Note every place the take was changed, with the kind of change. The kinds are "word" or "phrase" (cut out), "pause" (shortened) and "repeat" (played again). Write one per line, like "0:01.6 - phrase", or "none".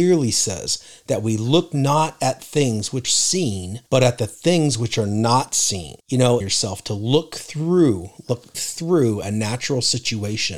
0:03.0 - word
0:03.9 - pause
0:06.0 - pause
0:06.4 - phrase
0:08.5 - word